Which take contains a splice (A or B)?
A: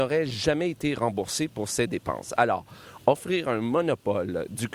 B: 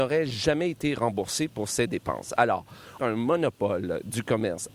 B